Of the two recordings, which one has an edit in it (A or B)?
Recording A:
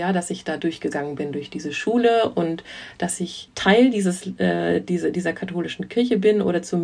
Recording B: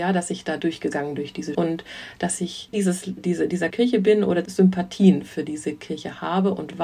B